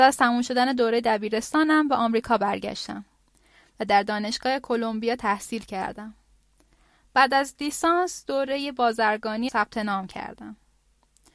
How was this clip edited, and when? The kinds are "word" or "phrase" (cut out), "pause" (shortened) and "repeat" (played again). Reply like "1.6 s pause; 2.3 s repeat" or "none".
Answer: 9.5 s phrase

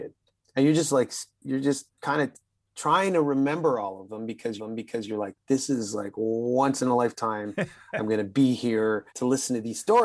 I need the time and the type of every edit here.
4.6 s repeat; 9.1 s pause

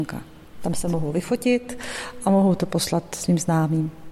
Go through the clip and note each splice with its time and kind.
none

